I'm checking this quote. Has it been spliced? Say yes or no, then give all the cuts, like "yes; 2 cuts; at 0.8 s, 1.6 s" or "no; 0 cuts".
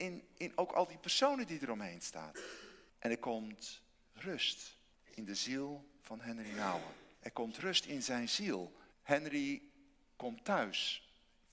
yes; 4 cuts; at 2.9 s, 4.9 s, 7.1 s, 8.9 s